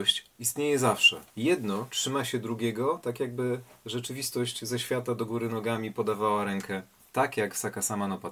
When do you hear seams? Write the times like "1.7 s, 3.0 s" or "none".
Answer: 1.3 s